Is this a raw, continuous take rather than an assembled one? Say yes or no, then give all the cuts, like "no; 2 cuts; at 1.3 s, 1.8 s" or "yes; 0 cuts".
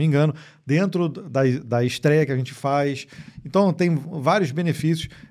yes; 0 cuts